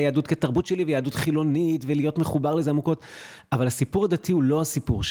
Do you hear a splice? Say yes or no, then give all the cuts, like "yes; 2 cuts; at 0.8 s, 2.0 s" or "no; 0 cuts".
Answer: no; 0 cuts